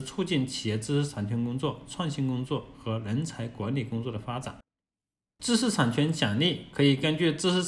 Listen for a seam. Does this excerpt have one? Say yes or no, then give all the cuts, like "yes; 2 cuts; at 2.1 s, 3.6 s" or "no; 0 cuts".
no; 0 cuts